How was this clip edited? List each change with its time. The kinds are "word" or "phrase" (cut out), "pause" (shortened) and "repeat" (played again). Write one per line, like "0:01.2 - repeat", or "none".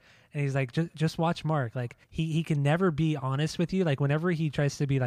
0:02.0 - pause